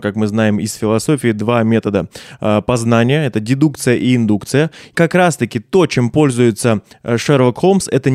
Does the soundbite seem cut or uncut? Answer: cut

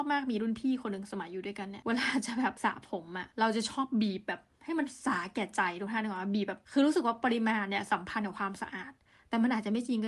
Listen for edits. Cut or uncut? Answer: uncut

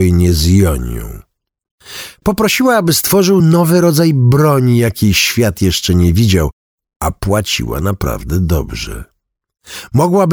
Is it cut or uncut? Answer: uncut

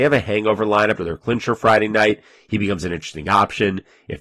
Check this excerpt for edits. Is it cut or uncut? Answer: cut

